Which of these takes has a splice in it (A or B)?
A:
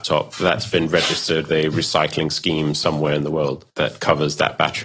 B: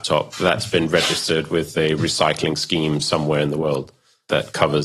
A